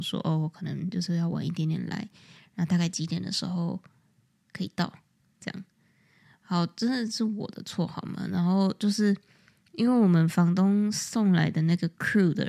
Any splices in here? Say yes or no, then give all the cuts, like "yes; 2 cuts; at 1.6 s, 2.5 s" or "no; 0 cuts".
no; 0 cuts